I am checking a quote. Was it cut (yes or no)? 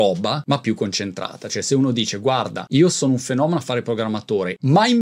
no